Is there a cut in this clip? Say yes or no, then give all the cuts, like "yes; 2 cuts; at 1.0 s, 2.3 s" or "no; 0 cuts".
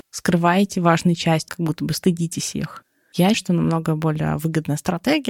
yes; 2 cuts; at 1.5 s, 3.3 s